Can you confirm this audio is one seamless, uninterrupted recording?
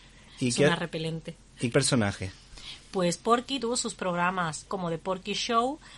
no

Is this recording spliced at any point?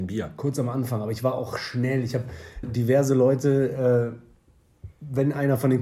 yes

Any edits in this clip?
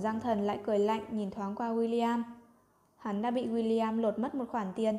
no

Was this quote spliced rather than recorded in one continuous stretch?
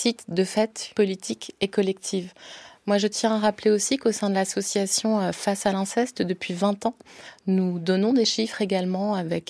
yes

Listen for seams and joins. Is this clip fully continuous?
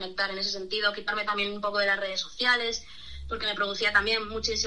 yes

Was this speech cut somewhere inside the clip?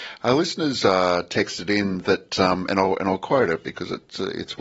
no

